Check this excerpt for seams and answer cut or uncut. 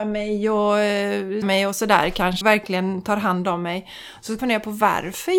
cut